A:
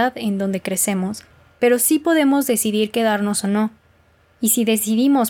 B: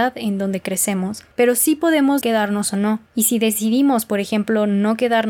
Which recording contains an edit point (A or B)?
B